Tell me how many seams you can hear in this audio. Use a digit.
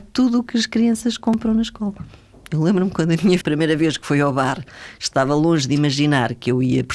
1